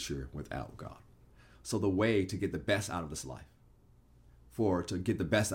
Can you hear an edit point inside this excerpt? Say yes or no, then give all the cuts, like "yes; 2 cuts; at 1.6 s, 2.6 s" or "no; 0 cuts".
no; 0 cuts